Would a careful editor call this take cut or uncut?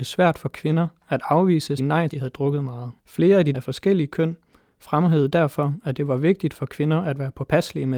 cut